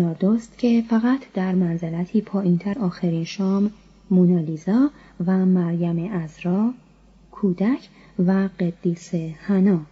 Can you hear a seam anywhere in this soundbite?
yes; 1 cut; at 2.7 s

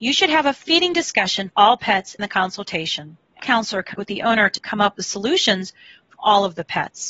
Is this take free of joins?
no; 6 cuts; at 1.5 s, 2.2 s, 3.4 s, 3.9 s, 4.6 s, 6.1 s

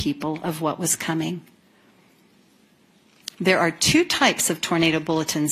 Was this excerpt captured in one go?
no; 1 cut; at 3.3 s

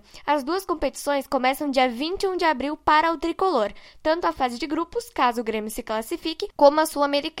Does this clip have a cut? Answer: no; 0 cuts

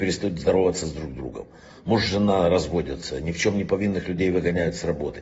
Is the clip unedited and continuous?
yes; 0 cuts

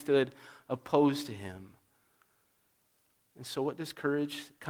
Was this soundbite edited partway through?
no; 0 cuts

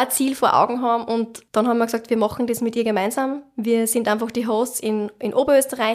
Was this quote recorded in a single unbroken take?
no; 1 cut; at 1.5 s

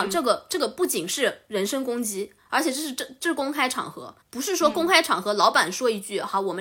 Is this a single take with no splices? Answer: no; 1 cut; at 4.2 s

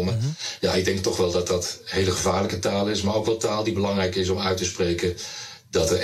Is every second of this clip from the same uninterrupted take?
yes; 0 cuts

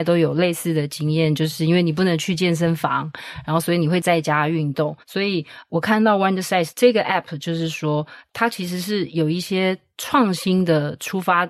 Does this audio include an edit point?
yes; 1 cut; at 5.0 s

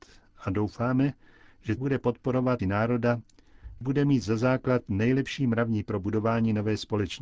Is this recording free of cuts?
no; 4 cuts; at 1.8 s, 2.6 s, 3.8 s, 5.8 s

